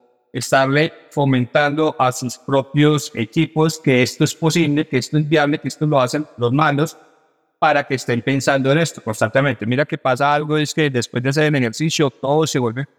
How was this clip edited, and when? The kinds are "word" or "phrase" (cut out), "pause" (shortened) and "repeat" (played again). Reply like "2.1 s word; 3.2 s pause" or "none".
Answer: none